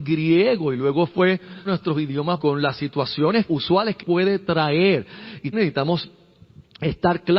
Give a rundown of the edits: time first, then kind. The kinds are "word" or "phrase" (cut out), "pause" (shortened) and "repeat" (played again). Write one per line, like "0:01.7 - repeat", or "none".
0:01.7 - word
0:02.4 - word
0:03.5 - word
0:04.0 - word
0:05.5 - word